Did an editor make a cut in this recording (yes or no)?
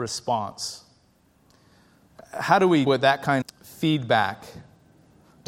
yes